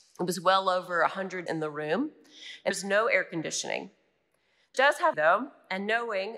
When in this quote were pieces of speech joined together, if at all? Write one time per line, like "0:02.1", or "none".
0:01.5
0:02.7
0:04.7
0:05.1